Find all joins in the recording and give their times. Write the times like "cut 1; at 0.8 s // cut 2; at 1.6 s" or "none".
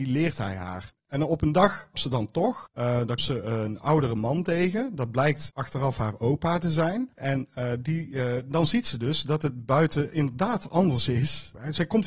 cut 1; at 1.9 s // cut 2; at 3.2 s // cut 3; at 7.1 s